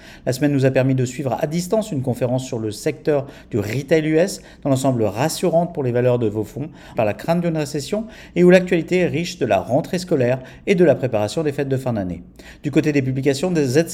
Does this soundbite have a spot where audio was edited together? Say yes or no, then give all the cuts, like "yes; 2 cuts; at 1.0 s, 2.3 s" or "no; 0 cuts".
yes; 1 cut; at 6.9 s